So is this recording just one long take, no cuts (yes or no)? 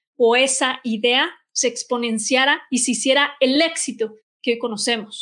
yes